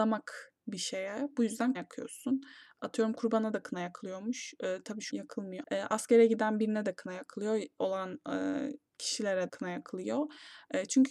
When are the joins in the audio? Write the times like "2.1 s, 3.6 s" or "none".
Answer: 1.7 s, 5.1 s, 5.6 s, 7.8 s, 9.5 s